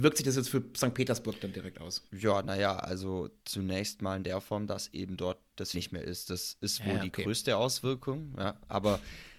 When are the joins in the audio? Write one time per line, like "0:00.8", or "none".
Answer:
0:02.1
0:03.4
0:05.7

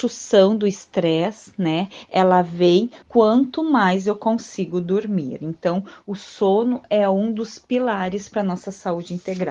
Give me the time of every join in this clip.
0:03.0

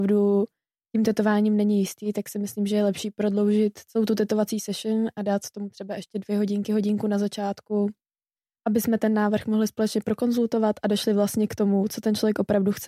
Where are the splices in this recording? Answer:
0:08.3

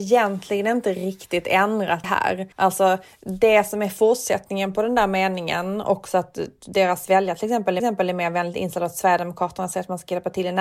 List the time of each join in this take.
0:02.0
0:02.5
0:07.8

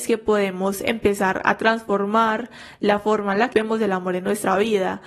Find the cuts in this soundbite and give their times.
0:03.5

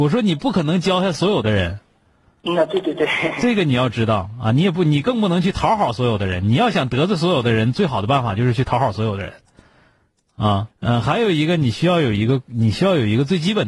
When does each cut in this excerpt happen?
0:10.7

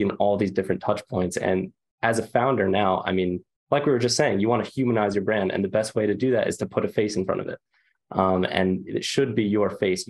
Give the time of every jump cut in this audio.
none

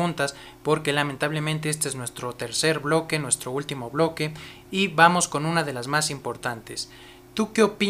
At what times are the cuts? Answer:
none

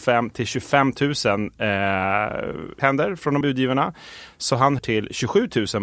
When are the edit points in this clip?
0:02.8
0:03.4
0:04.8

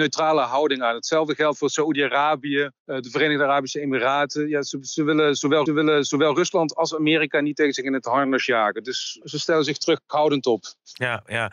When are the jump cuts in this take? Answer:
0:02.8
0:05.7
0:09.2

